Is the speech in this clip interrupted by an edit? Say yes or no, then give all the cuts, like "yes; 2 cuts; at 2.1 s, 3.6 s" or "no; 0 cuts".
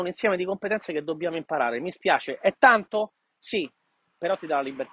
no; 0 cuts